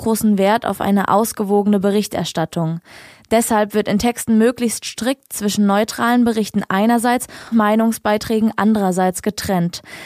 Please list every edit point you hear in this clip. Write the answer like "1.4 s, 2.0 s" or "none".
7.5 s